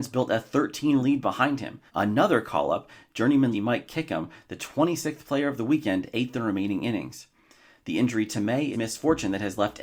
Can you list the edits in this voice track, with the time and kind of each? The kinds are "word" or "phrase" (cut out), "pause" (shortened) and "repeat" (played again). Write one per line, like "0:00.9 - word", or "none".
0:01.0 - word
0:01.9 - pause
0:03.5 - word
0:08.7 - phrase